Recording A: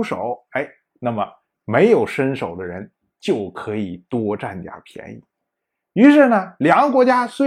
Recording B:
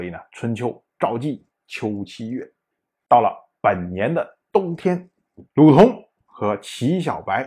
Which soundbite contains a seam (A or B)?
B